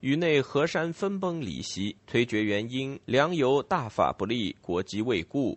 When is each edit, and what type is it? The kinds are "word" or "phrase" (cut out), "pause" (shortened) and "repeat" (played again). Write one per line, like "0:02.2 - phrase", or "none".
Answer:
0:02.0 - pause
0:03.0 - pause